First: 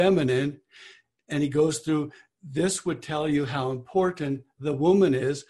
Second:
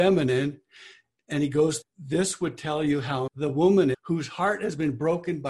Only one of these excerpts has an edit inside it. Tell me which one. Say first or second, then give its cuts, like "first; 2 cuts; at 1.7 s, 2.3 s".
second; 3 cuts; at 1.8 s, 3.3 s, 3.9 s